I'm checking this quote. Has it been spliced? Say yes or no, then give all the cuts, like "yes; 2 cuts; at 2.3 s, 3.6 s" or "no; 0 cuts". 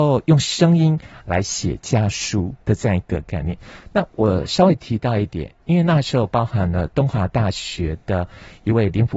yes; 1 cut; at 2.6 s